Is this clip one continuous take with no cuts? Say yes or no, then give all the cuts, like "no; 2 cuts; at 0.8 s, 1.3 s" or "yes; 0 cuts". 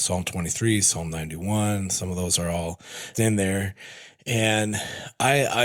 no; 1 cut; at 3.1 s